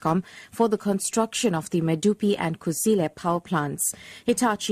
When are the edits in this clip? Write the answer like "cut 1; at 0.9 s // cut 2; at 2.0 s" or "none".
none